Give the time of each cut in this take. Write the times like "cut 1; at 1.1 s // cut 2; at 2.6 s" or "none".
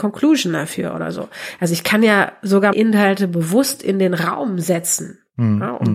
cut 1; at 2.7 s